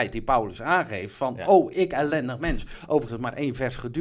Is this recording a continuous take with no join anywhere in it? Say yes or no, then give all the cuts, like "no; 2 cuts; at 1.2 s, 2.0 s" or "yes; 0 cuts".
no; 1 cut; at 3.1 s